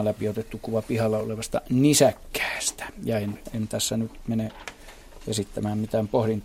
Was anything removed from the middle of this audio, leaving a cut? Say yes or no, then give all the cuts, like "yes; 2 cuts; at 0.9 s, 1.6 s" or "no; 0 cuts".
no; 0 cuts